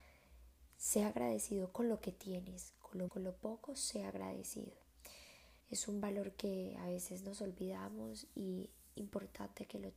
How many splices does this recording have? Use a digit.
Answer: 3